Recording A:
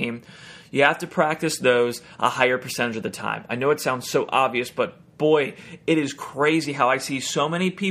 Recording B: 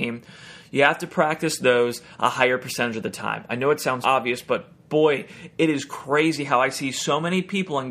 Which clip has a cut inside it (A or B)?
B